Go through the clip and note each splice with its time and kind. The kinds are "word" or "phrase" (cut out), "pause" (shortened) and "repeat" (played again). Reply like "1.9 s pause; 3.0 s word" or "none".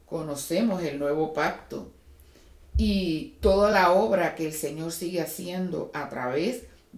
none